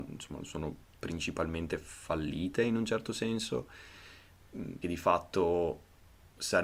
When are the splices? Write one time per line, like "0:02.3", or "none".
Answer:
0:04.8

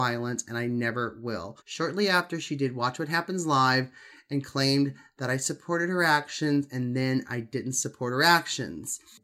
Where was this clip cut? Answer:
0:01.6

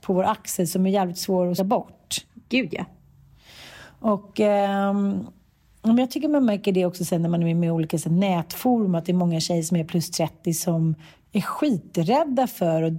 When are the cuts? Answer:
0:01.6

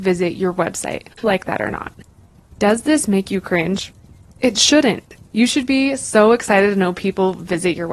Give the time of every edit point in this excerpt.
0:01.2

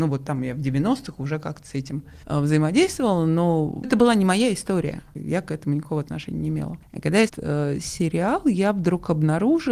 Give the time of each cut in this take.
0:02.2
0:03.8
0:07.3

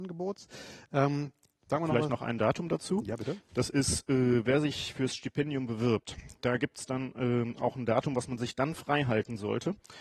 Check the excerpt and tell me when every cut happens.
none

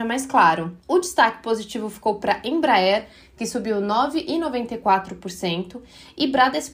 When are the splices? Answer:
none

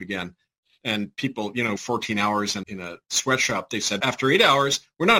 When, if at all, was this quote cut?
0:01.8
0:02.6
0:04.0

